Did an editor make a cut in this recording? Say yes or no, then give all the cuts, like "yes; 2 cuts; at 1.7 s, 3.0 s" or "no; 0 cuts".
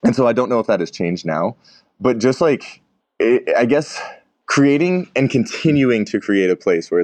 no; 0 cuts